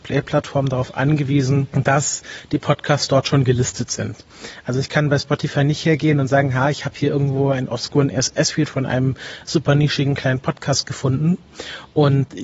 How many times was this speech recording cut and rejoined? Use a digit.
0